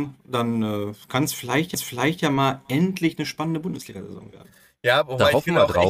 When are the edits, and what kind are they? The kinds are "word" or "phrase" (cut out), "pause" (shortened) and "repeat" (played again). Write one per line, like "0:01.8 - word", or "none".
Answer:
0:01.7 - repeat